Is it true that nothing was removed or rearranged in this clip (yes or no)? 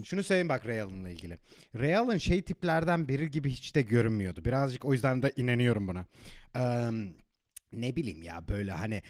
yes